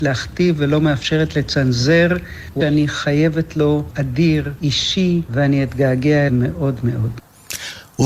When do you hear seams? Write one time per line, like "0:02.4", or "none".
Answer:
0:02.6
0:03.9
0:05.3
0:06.3